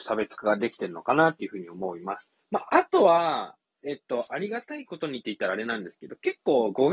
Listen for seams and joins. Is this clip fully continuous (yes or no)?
no